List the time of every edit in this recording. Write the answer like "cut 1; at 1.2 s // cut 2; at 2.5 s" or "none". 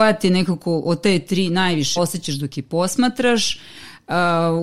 cut 1; at 2.0 s